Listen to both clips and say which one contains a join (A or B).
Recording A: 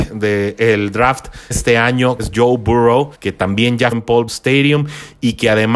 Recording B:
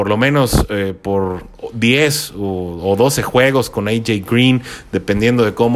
A